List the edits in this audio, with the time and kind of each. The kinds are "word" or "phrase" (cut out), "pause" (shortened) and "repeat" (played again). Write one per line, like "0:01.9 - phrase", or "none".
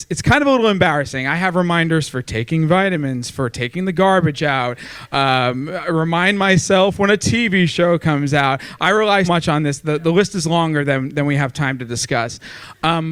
0:09.2 - word